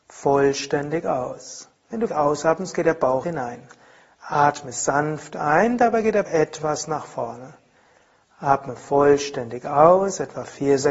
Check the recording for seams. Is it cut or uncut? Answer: cut